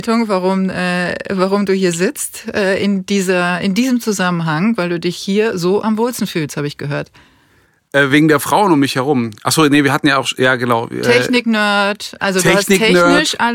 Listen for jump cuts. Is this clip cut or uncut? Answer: uncut